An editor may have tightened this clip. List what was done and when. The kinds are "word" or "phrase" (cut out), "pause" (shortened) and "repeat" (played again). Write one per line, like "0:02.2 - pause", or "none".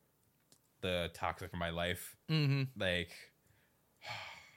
0:01.5 - phrase
0:02.2 - pause